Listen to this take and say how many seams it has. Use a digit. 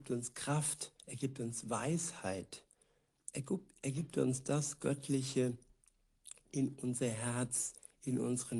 1